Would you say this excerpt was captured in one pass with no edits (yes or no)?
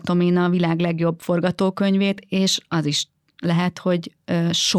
yes